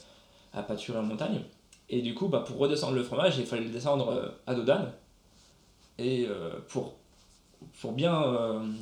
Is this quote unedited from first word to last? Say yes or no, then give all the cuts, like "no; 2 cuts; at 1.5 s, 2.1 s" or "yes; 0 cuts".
yes; 0 cuts